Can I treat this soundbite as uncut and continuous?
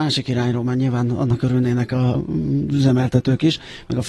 no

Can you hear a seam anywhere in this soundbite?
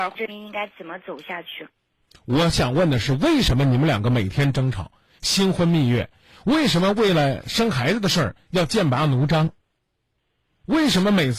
no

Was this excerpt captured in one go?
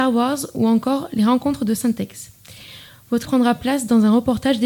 no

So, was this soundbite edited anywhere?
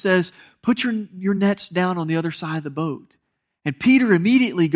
no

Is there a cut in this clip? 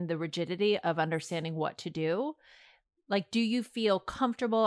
no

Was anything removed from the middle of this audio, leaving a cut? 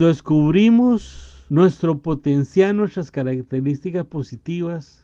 no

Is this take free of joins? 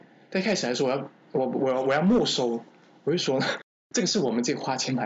yes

